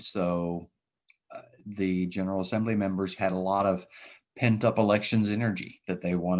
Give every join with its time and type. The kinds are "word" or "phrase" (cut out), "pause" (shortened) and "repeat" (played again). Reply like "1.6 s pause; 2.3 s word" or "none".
none